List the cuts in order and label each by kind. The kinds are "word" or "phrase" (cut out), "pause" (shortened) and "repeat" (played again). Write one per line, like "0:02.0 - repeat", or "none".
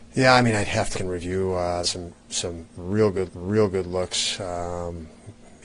0:00.9 - word
0:01.8 - phrase
0:03.3 - repeat